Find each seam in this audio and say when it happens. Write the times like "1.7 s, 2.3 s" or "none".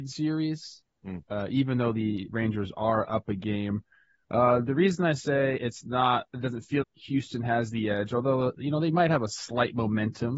6.8 s